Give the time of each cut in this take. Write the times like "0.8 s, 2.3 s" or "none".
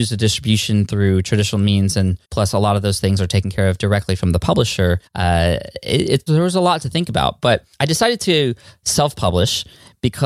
2.2 s, 5.1 s, 6.3 s, 7.7 s